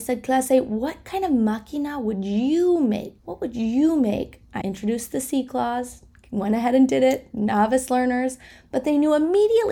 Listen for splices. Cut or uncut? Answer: cut